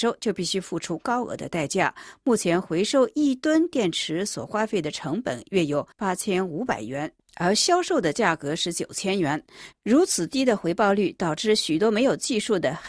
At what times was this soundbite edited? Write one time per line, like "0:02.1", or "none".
0:05.9